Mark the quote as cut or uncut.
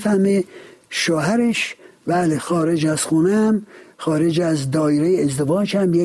uncut